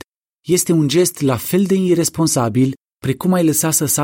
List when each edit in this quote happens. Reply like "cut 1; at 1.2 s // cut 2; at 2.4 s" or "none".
none